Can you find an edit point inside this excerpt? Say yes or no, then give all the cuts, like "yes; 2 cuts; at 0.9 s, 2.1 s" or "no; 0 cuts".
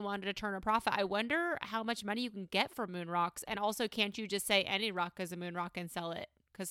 no; 0 cuts